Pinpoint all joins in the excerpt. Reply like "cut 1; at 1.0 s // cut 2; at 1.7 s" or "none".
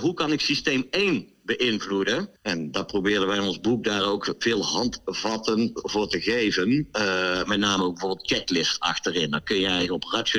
cut 1; at 2.4 s